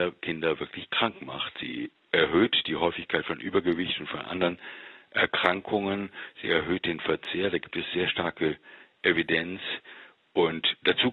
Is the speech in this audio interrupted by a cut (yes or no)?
no